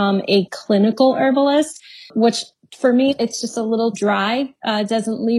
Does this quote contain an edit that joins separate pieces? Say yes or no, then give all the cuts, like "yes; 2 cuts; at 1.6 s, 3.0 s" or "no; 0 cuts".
yes; 1 cut; at 3.9 s